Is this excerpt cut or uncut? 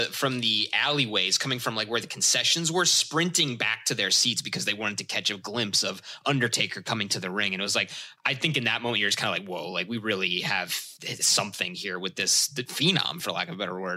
uncut